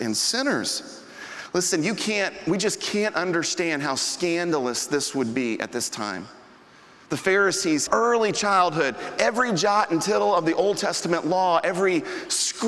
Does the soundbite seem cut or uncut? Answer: cut